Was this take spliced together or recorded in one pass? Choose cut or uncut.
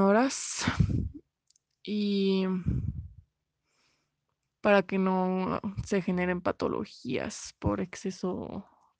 uncut